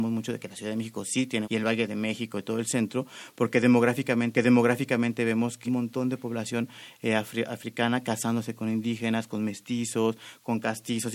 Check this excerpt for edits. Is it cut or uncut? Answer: cut